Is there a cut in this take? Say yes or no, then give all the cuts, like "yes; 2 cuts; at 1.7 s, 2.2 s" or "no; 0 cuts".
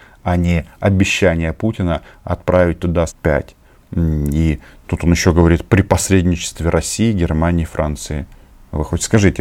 yes; 1 cut; at 3.1 s